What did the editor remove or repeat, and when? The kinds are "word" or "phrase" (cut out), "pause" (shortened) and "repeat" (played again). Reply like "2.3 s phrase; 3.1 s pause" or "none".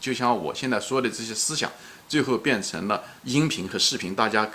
3.2 s pause